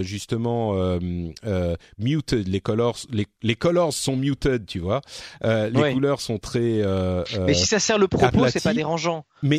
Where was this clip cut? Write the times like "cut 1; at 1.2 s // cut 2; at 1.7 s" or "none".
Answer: none